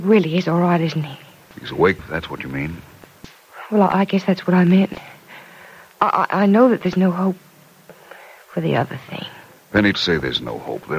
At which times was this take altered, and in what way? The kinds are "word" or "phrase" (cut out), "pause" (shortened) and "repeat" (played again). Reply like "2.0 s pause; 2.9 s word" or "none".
2.0 s word; 9.9 s word